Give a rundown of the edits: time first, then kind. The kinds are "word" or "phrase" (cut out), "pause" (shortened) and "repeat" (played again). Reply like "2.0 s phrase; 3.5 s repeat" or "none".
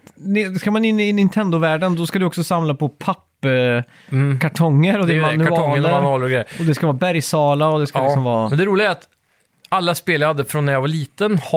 none